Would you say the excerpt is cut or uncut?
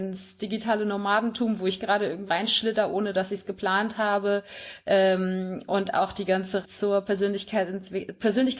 cut